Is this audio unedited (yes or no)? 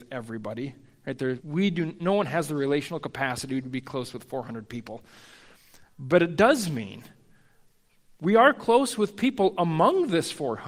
no